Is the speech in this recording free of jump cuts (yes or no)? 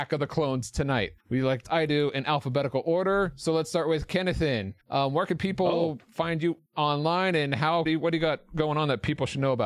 no